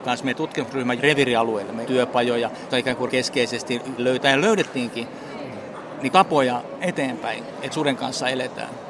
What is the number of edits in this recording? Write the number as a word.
eight